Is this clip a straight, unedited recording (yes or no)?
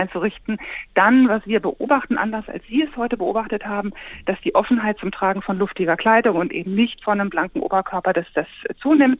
yes